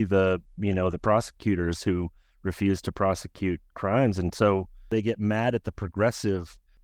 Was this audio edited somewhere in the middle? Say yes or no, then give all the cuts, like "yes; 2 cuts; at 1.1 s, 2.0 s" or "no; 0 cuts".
no; 0 cuts